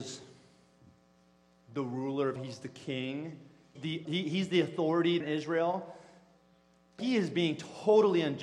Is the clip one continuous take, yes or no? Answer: no